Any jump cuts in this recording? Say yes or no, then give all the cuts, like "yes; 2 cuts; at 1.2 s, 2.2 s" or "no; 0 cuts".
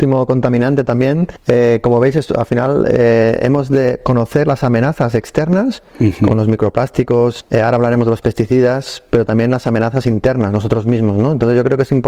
yes; 1 cut; at 6.3 s